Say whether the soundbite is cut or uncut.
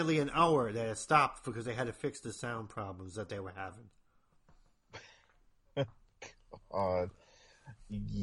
uncut